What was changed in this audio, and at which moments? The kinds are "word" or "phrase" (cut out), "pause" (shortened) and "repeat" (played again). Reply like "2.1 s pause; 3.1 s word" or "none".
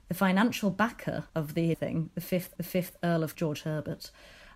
1.3 s pause; 1.7 s word; 2.6 s repeat; 3.3 s word